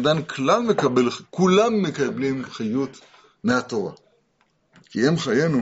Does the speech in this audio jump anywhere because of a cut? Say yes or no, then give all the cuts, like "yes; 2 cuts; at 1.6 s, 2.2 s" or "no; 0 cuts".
no; 0 cuts